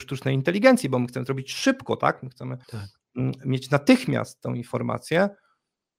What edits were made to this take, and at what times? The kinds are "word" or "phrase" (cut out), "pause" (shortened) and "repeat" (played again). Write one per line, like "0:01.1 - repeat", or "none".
0:02.6 - pause

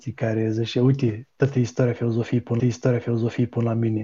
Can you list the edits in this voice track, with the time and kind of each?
0:02.6 - repeat

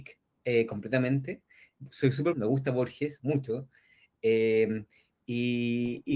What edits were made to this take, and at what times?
0:02.3 - word
0:03.2 - word

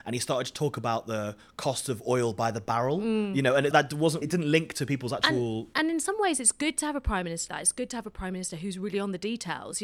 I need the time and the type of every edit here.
0:03.7 - word
0:04.2 - word
0:07.5 - word

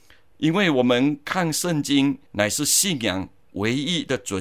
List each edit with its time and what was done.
0:02.3 - pause

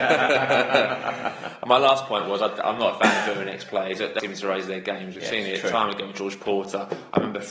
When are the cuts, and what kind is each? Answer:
0:04.2 - word

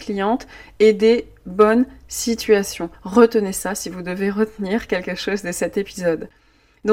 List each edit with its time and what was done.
0:02.9 - pause

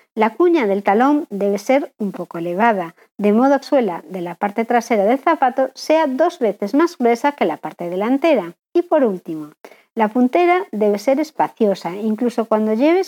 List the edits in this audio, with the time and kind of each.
0:03.6 - word
0:08.6 - pause

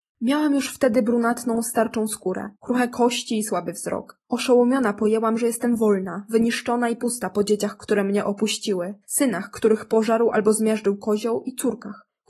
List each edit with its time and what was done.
0:02.5 - pause
0:04.2 - pause
0:09.0 - pause

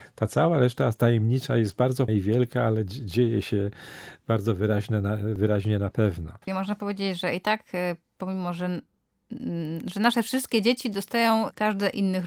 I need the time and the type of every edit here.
0:02.1 - word
0:06.4 - pause

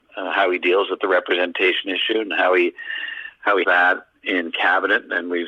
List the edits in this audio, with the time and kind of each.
0:03.6 - word

